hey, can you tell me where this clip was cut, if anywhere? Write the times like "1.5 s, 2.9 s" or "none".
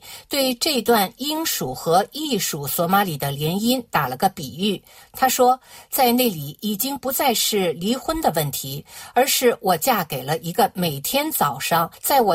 none